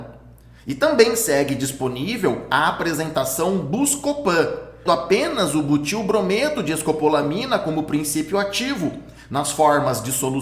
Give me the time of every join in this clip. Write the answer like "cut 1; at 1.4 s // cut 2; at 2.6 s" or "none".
cut 1; at 4.9 s